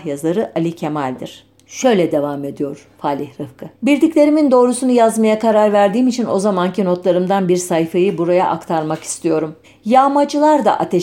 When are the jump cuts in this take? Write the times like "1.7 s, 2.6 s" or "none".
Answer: 3.7 s, 9.6 s